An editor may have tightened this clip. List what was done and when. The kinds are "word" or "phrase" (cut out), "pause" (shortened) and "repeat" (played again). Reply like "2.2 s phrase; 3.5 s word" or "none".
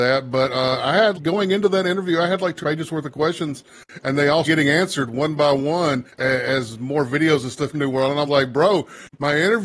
1.1 s word; 2.6 s phrase; 4.4 s word; 6.1 s pause; 7.7 s phrase; 8.3 s word